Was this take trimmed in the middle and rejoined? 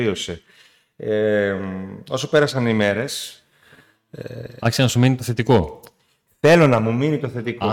no; 0 cuts

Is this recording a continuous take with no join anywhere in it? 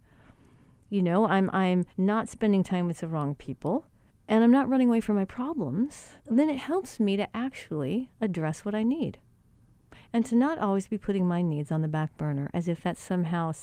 no; 3 cuts; at 1.9 s, 4.1 s, 6.2 s

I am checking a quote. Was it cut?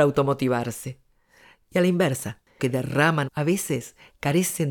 yes; 2 cuts; at 2.6 s, 3.2 s

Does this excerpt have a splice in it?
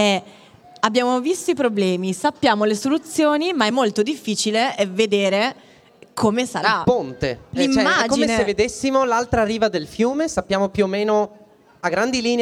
no; 0 cuts

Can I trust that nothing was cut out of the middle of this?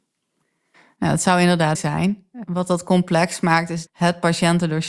no; 2 cuts; at 1.7 s, 3.9 s

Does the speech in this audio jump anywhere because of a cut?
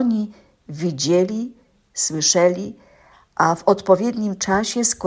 no; 0 cuts

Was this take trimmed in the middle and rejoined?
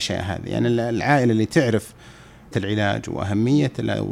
yes; 1 cut; at 2.5 s

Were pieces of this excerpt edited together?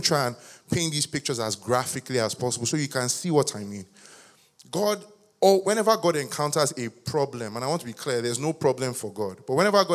no; 0 cuts

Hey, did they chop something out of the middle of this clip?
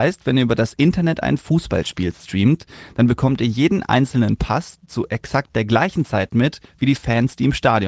no; 0 cuts

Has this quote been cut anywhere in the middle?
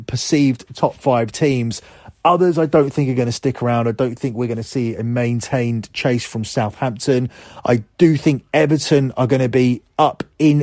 no; 0 cuts

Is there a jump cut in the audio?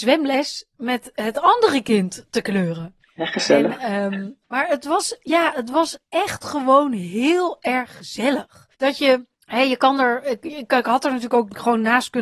yes; 4 cuts; at 3.0 s, 4.4 s, 8.7 s, 9.3 s

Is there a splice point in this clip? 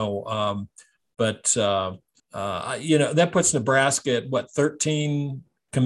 yes; 1 cut; at 2.2 s

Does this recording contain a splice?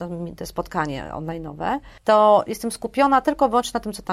no; 0 cuts

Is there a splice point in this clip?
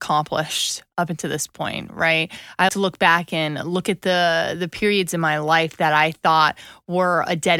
yes; 1 cut; at 2.7 s

